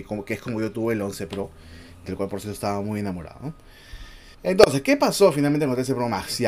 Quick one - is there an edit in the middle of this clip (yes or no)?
yes